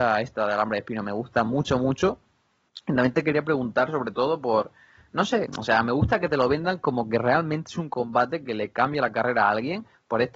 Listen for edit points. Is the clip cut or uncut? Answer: uncut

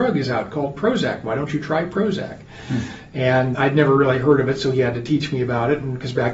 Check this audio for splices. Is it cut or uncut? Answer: cut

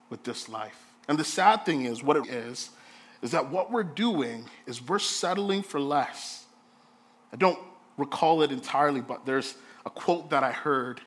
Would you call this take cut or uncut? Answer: cut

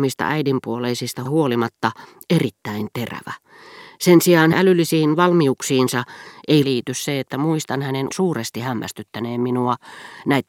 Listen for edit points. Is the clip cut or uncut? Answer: cut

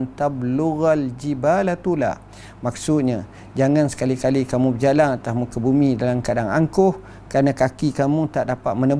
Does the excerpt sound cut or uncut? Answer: uncut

